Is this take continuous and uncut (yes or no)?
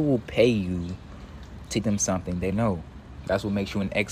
no